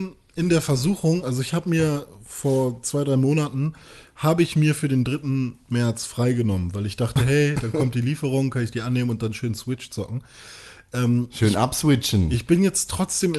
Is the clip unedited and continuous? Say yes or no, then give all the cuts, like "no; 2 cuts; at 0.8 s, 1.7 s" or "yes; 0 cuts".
yes; 0 cuts